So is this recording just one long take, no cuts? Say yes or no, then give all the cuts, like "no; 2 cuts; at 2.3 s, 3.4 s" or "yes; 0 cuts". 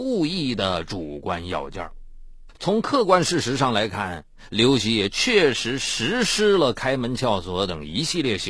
yes; 0 cuts